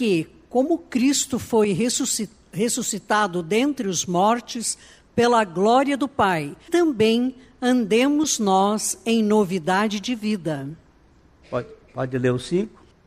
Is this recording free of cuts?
no; 1 cut; at 6.7 s

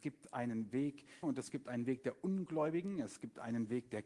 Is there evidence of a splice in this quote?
yes; 1 cut; at 1.2 s

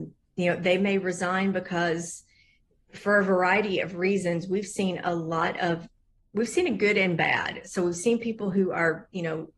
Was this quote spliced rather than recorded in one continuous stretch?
no; 0 cuts

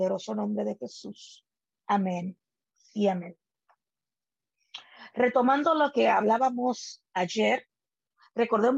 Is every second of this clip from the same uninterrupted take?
yes; 0 cuts

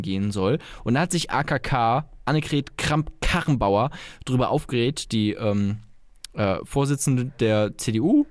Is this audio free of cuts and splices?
yes; 0 cuts

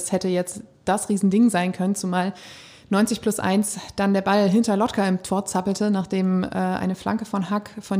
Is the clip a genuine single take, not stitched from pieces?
yes; 0 cuts

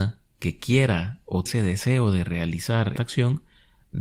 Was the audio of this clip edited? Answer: yes; 2 cuts; at 1.5 s, 3.0 s

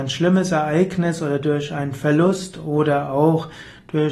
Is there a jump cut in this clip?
no; 0 cuts

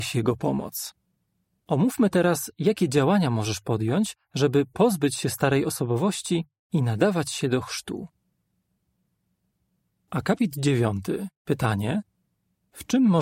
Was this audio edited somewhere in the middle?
no; 0 cuts

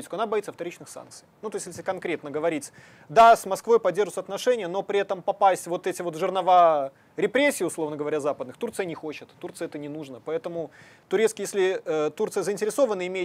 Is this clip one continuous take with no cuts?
yes; 0 cuts

